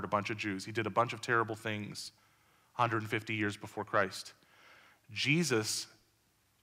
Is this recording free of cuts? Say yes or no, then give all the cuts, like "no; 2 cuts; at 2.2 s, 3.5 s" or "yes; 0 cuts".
yes; 0 cuts